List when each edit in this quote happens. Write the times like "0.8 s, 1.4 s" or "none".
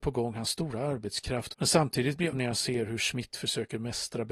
1.5 s, 2.3 s